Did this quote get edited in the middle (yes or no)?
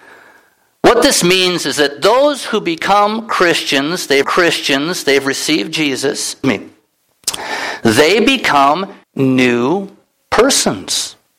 yes